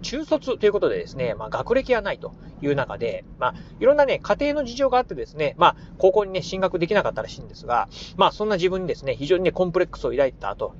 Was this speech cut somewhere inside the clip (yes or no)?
no